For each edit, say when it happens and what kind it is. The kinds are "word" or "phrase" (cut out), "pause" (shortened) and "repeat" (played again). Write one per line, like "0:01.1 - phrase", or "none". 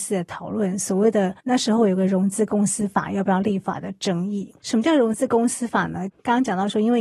0:01.4 - pause
0:04.6 - pause